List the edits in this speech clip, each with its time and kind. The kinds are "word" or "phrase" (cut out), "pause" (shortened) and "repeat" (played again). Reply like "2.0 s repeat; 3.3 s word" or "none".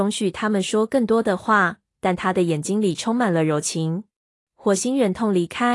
4.3 s pause